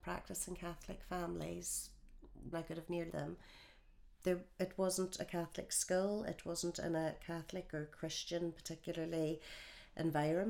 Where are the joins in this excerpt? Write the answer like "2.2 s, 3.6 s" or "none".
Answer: 2.5 s, 3.1 s